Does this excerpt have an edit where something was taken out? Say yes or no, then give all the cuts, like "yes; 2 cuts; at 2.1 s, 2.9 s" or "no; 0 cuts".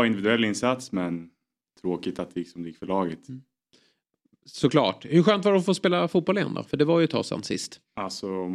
no; 0 cuts